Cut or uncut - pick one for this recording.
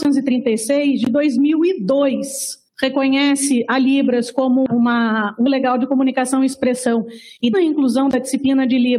cut